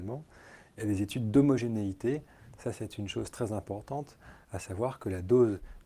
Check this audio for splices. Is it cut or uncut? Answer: uncut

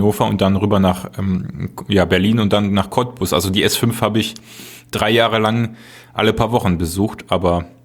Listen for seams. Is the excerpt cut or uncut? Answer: uncut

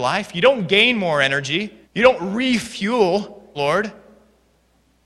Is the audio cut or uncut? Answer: cut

